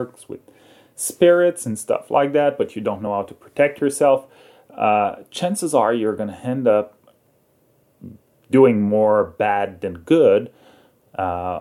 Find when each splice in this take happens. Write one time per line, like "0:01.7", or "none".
none